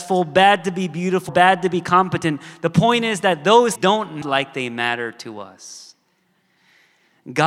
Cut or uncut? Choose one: cut